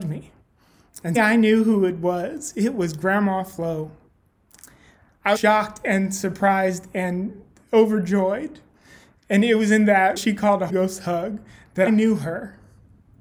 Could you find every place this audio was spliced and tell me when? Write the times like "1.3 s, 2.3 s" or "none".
1.1 s, 5.3 s, 10.2 s, 10.7 s, 11.9 s